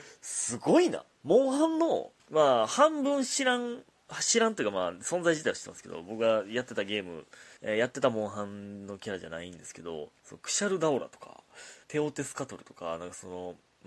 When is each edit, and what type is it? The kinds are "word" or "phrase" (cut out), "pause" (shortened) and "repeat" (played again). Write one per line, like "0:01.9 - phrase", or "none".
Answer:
0:01.1 - pause
0:02.2 - pause
0:07.6 - pause
0:10.2 - pause
0:11.8 - pause